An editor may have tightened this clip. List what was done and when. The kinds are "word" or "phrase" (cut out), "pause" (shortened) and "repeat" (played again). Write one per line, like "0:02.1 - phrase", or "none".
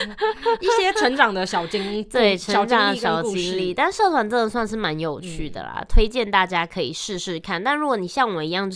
none